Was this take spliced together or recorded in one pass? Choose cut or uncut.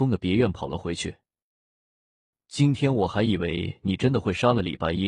uncut